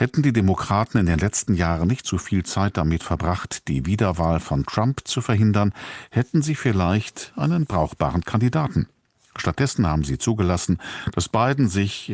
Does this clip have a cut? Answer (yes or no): no